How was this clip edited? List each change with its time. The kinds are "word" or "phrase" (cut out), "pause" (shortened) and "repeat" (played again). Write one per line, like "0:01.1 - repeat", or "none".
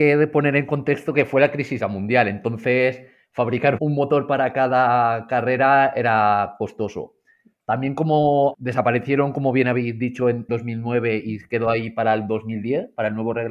0:01.8 - word
0:03.8 - word
0:08.5 - word
0:10.5 - word